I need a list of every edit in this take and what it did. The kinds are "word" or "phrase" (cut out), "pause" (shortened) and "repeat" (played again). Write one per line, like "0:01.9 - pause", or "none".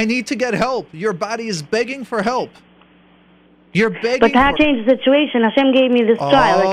0:04.6 - phrase